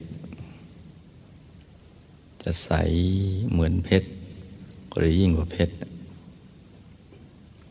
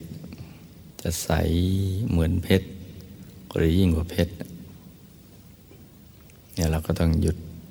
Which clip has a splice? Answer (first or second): second